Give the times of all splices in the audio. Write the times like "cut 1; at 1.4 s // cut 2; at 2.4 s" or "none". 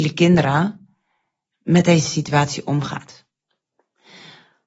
none